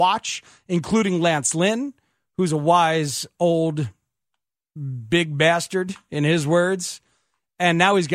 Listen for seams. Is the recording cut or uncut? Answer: uncut